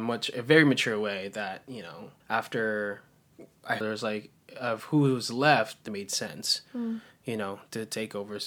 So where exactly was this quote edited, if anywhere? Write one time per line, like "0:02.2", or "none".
0:02.2
0:03.8
0:05.9

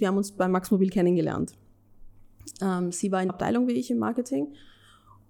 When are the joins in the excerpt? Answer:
0:03.3

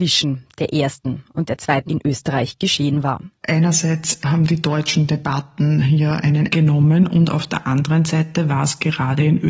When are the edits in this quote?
0:01.9
0:06.5

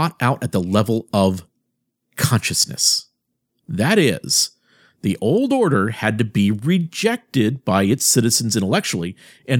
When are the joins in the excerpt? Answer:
none

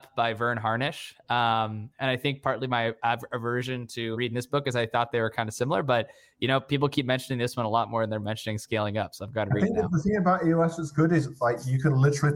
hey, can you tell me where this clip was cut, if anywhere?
0:04.1

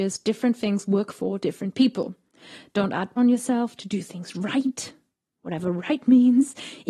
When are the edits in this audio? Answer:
0:03.2

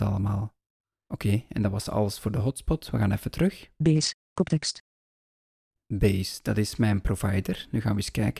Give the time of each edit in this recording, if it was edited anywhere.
none

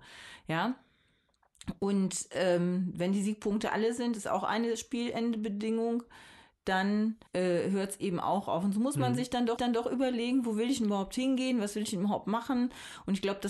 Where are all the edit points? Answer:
0:07.3
0:09.6

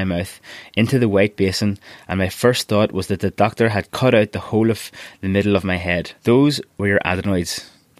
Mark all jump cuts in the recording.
0:06.2

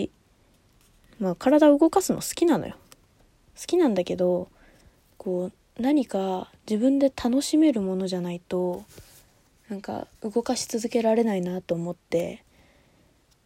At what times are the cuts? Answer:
0:10.1

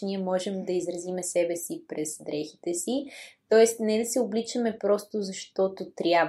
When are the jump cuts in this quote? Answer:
none

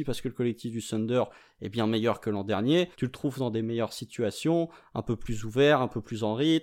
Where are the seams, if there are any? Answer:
0:02.9

